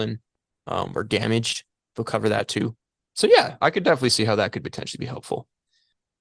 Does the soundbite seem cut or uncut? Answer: uncut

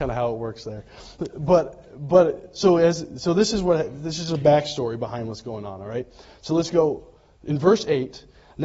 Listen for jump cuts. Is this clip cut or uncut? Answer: uncut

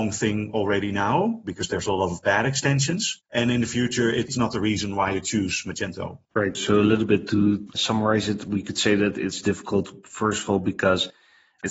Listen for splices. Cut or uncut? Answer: cut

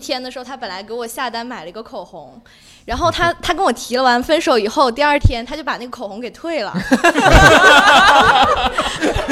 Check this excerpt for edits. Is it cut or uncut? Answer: uncut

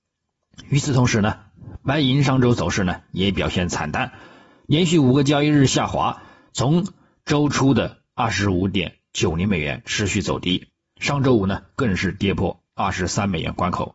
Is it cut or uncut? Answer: uncut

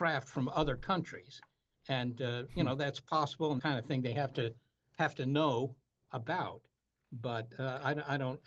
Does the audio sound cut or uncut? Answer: cut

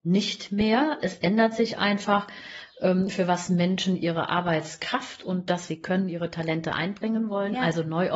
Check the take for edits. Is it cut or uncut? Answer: cut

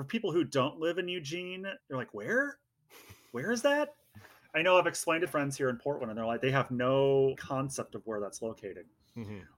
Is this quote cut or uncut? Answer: cut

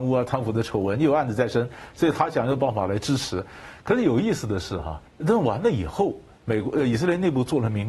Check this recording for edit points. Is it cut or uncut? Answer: cut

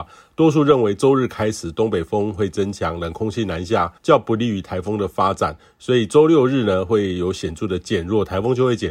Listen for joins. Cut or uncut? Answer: cut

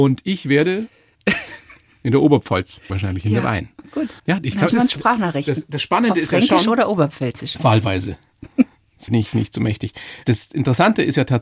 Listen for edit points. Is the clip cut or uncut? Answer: cut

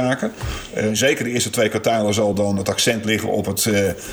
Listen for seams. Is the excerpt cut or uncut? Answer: uncut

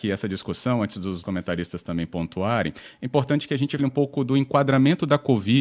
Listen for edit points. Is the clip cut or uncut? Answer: cut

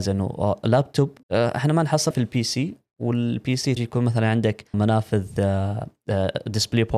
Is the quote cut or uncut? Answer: cut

